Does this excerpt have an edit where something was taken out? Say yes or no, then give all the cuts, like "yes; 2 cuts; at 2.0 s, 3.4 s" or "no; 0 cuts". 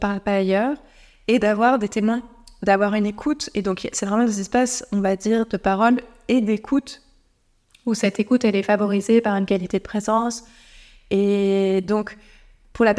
no; 0 cuts